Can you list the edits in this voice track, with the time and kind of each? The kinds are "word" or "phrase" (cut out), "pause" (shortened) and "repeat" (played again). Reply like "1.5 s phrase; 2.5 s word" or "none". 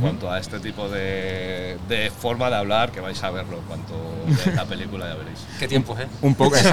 2.9 s word